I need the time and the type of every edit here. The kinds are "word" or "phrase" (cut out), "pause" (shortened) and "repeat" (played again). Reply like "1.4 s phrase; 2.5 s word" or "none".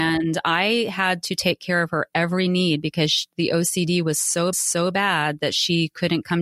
4.5 s repeat